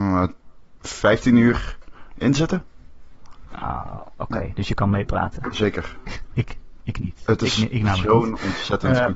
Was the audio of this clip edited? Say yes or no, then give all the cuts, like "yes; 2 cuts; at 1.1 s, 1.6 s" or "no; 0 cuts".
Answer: no; 0 cuts